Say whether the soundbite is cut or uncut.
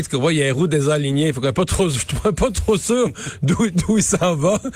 uncut